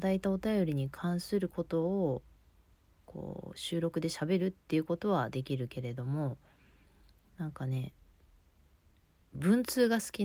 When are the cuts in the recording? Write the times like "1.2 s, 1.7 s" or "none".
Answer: none